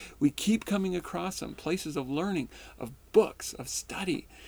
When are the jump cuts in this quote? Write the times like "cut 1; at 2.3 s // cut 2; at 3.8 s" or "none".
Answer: none